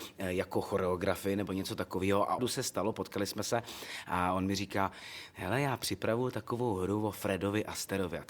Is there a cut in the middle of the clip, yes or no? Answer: yes